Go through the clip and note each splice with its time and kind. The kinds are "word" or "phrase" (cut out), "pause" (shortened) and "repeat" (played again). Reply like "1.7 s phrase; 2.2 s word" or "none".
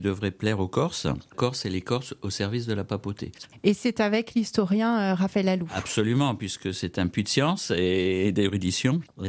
1.3 s word